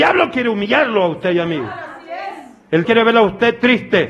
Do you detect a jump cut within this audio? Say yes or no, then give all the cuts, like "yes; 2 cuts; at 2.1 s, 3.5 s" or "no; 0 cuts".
yes; 1 cut; at 2.8 s